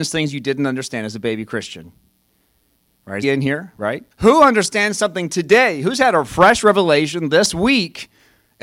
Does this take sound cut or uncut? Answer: cut